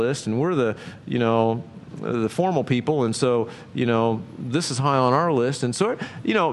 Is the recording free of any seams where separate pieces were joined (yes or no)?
yes